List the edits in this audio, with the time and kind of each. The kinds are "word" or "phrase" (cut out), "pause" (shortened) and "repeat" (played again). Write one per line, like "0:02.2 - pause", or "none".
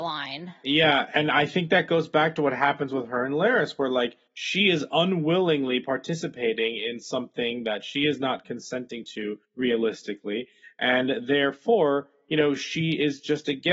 0:04.3 - pause
0:09.4 - pause